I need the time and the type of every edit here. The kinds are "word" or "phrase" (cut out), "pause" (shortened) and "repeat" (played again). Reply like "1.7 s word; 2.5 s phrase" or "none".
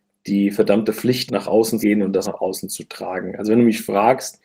1.3 s word; 1.8 s word; 2.2 s word